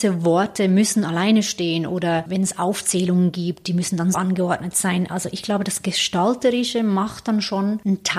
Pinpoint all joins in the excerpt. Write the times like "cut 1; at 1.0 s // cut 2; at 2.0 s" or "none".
cut 1; at 4.1 s